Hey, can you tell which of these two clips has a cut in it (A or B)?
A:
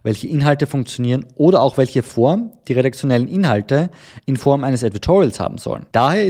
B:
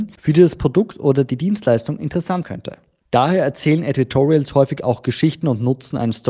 B